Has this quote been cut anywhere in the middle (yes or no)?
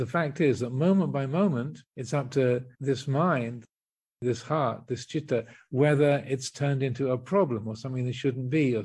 yes